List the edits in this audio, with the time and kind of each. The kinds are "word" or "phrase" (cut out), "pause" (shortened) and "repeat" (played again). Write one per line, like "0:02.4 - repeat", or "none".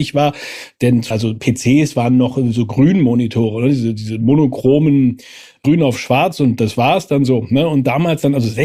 0:01.1 - word